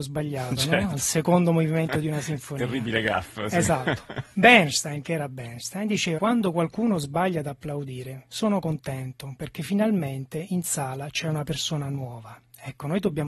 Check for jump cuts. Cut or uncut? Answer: cut